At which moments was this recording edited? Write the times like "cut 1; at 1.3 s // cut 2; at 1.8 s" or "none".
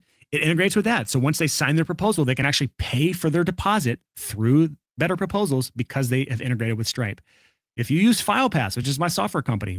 none